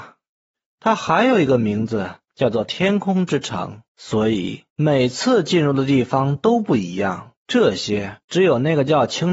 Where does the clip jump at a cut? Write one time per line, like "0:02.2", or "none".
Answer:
0:02.2
0:03.9
0:04.7
0:07.4
0:08.2